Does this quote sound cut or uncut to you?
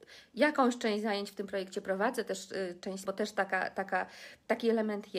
cut